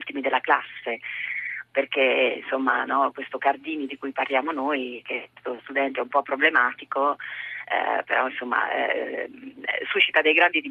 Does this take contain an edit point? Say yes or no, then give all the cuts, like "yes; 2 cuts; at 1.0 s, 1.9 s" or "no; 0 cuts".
no; 0 cuts